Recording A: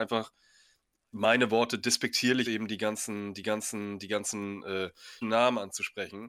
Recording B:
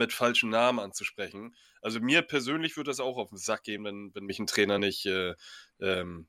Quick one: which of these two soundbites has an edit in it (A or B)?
A